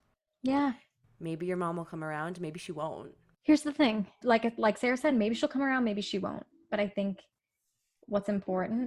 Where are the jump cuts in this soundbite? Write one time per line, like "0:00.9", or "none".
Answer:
none